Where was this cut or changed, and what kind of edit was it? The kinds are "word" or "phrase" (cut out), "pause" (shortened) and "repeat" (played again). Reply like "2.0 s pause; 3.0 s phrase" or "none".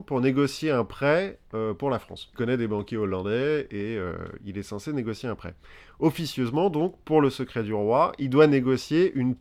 2.3 s phrase